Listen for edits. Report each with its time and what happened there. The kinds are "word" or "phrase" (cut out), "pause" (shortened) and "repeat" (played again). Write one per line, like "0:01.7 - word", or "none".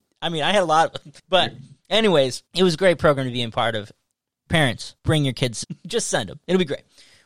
0:01.2 - pause
0:02.5 - pause
0:05.0 - pause
0:05.6 - word